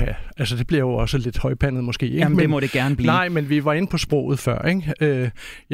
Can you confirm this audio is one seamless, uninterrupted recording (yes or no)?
yes